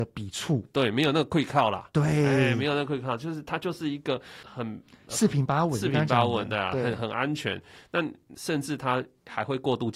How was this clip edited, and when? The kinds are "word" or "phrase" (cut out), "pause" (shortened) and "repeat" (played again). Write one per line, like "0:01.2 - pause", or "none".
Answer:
none